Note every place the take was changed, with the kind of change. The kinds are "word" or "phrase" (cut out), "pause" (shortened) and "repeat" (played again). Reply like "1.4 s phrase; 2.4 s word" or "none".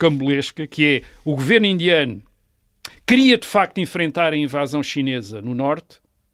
none